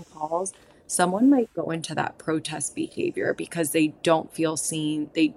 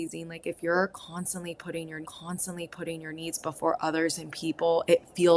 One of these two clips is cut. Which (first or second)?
second